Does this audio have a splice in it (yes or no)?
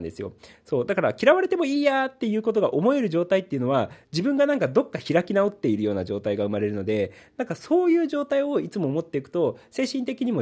no